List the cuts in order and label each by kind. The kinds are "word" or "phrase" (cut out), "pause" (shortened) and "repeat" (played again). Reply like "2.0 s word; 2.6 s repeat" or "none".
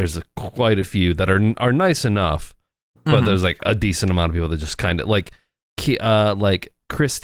none